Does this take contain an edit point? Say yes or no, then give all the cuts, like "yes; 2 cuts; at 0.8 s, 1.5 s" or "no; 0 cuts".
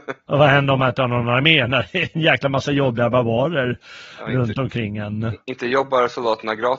no; 0 cuts